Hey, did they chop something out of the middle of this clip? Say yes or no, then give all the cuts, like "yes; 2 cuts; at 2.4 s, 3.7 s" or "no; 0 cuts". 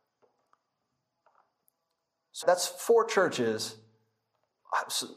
yes; 1 cut; at 2.4 s